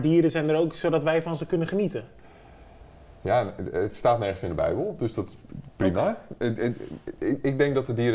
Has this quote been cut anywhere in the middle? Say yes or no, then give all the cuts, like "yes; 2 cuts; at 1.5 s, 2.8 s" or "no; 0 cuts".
no; 0 cuts